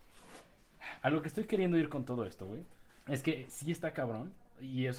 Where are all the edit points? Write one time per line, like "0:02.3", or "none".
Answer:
0:02.9